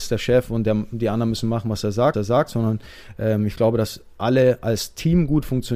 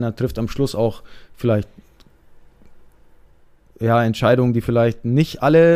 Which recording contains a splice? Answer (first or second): first